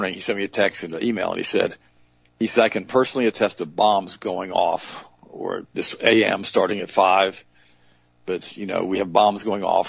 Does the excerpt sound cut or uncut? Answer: uncut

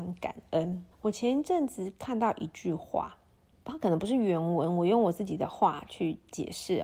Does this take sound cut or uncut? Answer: cut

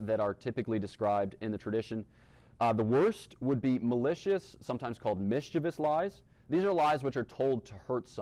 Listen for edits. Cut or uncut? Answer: uncut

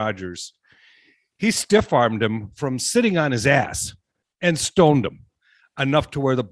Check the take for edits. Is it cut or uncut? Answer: uncut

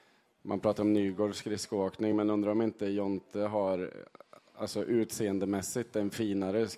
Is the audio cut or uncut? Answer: uncut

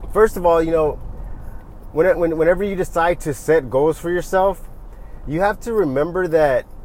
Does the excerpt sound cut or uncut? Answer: uncut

